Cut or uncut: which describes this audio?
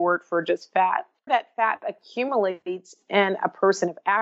cut